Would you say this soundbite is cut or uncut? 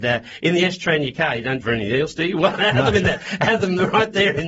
cut